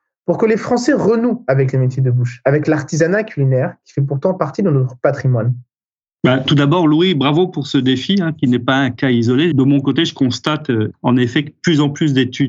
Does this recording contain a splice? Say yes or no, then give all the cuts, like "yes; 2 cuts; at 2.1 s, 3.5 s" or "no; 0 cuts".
no; 0 cuts